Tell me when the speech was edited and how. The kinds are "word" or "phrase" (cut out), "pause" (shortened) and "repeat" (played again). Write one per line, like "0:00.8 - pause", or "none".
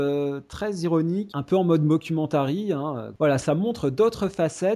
0:01.3 - word
0:03.4 - word